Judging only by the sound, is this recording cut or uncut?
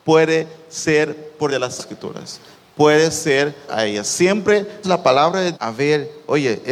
cut